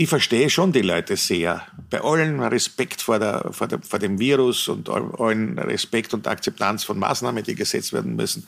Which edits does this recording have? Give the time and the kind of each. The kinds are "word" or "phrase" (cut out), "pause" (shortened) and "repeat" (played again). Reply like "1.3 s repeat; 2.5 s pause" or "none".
none